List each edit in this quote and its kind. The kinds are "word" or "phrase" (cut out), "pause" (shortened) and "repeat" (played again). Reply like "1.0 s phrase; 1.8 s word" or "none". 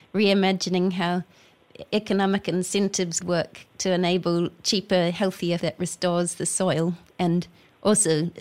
3.2 s word; 5.6 s word